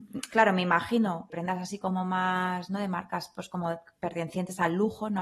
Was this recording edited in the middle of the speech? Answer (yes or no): yes